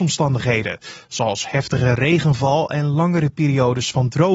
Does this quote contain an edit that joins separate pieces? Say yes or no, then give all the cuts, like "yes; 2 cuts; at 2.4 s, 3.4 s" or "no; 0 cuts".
no; 0 cuts